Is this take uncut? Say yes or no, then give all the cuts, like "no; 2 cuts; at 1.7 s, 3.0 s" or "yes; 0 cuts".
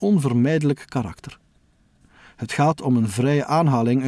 yes; 0 cuts